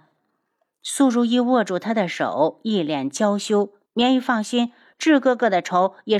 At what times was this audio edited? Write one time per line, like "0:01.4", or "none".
0:03.9